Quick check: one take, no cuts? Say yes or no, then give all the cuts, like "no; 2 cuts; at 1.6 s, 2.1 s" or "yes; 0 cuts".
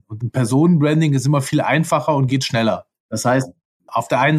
yes; 0 cuts